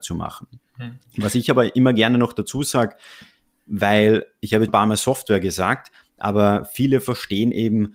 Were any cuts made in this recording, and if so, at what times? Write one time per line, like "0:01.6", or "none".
0:04.7